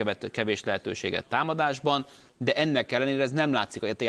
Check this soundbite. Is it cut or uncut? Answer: uncut